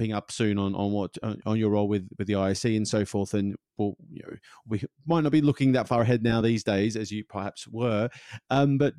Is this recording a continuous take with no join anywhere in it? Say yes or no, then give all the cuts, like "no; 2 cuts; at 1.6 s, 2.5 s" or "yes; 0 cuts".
yes; 0 cuts